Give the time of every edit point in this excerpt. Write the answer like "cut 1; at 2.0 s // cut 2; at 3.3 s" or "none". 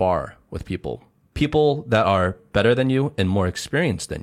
cut 1; at 1.2 s